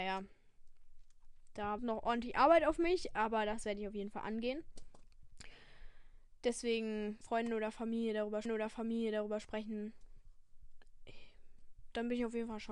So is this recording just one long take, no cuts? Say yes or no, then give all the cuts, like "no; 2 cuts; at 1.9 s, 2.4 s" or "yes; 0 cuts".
no; 3 cuts; at 1.8 s, 7.2 s, 8.4 s